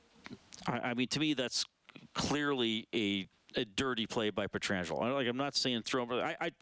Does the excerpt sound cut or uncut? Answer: cut